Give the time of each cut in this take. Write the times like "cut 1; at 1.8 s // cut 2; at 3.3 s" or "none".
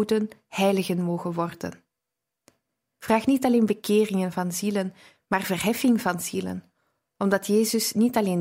none